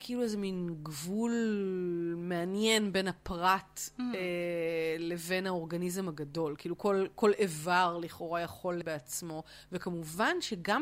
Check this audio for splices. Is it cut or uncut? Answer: cut